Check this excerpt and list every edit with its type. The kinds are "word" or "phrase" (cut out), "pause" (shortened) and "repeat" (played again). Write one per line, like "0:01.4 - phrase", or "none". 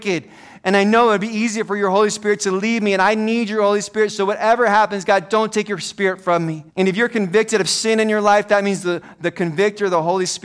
0:06.7 - pause